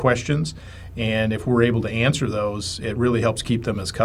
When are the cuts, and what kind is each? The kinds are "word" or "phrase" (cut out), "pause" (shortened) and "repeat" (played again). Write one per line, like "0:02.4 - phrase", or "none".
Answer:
none